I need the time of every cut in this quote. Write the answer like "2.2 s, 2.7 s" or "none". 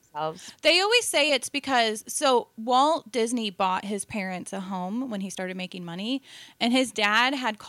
none